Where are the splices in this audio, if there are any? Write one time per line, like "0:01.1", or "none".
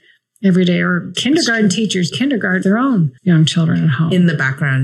0:01.1
0:02.1
0:02.6
0:03.2